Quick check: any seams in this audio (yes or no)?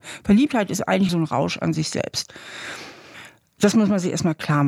yes